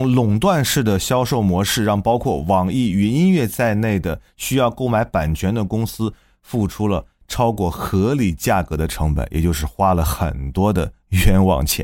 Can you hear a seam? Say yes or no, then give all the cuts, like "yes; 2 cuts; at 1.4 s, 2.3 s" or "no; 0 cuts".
no; 0 cuts